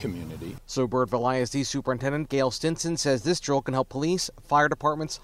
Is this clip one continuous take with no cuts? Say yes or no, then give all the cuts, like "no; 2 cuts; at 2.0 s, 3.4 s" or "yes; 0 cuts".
yes; 0 cuts